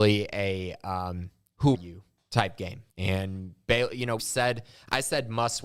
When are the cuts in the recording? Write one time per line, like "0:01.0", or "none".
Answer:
0:01.7
0:02.9
0:04.2

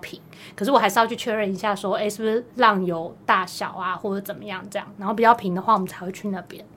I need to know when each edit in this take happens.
0:02.5

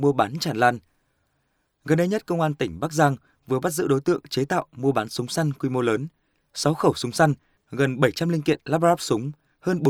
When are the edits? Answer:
none

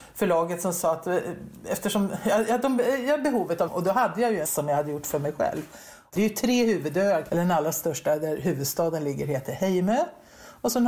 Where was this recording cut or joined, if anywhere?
0:03.7
0:04.5
0:07.3

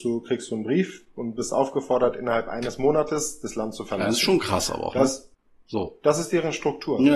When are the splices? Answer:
0:05.3

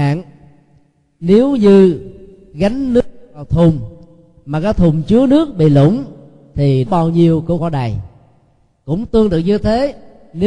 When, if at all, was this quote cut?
0:06.9
0:07.6

